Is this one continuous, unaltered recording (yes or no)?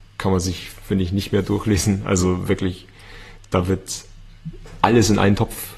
yes